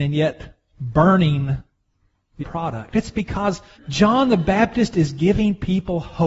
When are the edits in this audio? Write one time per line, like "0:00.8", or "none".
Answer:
0:02.4
0:03.7